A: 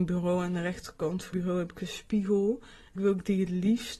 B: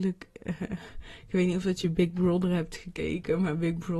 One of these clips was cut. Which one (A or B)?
A